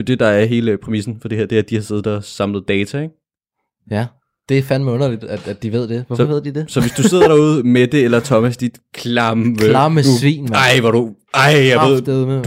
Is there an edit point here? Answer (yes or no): no